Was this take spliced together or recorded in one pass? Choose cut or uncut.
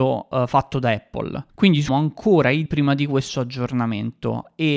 cut